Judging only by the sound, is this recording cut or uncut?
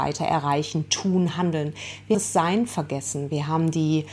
cut